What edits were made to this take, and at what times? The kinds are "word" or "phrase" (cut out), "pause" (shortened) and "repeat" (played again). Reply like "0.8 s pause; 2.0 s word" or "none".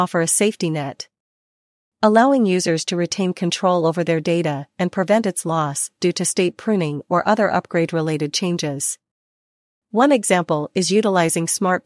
none